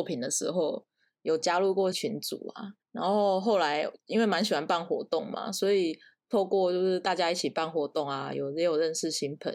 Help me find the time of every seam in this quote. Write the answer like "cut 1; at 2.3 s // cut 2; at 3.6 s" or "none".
cut 1; at 1.9 s // cut 2; at 2.8 s